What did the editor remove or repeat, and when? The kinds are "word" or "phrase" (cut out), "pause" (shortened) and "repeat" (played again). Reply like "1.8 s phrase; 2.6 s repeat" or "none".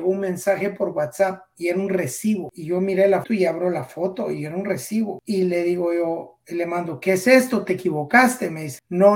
3.2 s word